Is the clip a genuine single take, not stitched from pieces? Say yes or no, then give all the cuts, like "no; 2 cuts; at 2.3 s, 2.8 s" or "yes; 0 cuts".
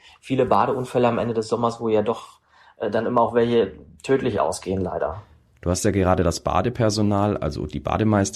yes; 0 cuts